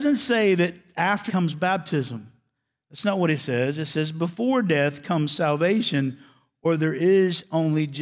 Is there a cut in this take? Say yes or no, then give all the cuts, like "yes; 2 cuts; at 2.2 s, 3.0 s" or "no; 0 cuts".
yes; 1 cut; at 1.3 s